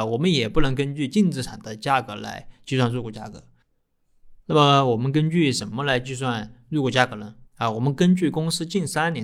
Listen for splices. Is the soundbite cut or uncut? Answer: cut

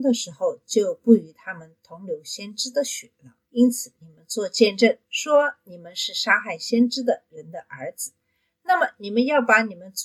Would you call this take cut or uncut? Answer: cut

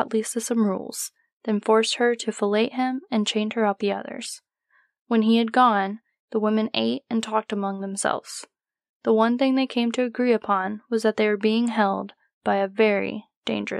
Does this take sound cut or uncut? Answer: cut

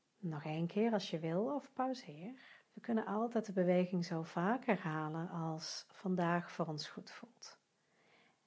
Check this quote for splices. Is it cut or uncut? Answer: cut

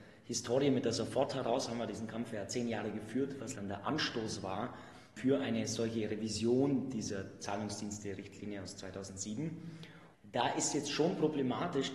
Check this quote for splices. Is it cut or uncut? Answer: cut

